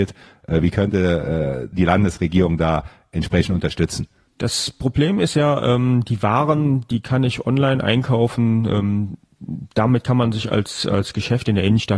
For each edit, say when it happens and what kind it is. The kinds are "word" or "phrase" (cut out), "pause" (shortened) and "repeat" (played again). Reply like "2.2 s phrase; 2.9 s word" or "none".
none